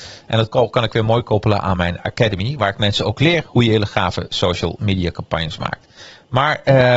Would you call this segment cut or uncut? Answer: uncut